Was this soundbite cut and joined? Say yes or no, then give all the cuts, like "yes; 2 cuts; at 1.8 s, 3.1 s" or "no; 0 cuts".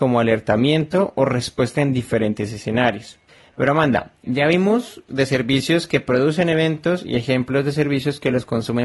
yes; 2 cuts; at 1.7 s, 5.1 s